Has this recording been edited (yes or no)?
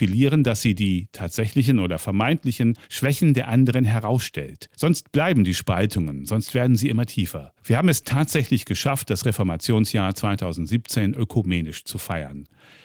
yes